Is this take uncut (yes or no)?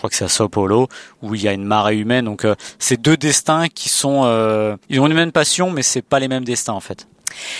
no